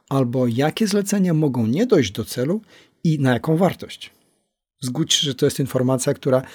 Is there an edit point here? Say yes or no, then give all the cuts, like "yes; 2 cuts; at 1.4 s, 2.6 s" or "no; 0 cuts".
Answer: no; 0 cuts